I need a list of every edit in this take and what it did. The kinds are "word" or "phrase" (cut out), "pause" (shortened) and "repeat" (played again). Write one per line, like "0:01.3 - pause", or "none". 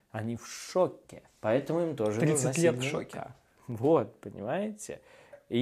none